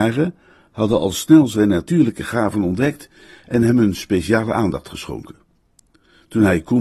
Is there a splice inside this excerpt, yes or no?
no